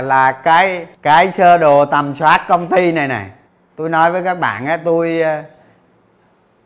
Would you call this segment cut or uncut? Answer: cut